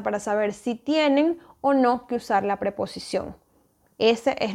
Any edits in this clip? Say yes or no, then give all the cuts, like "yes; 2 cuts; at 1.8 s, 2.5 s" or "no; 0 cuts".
no; 0 cuts